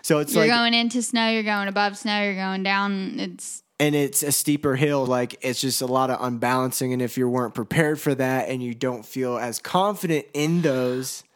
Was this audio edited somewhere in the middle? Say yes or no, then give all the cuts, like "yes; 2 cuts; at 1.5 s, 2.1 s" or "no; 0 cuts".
yes; 1 cut; at 5.1 s